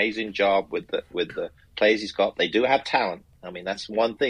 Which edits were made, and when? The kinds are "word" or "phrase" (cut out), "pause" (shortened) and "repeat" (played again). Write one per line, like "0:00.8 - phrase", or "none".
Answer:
none